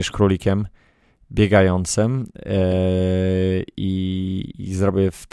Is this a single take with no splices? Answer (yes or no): yes